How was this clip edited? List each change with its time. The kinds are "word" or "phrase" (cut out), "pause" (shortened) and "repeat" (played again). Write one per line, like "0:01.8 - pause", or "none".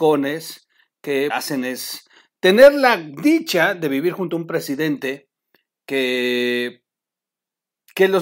0:01.3 - phrase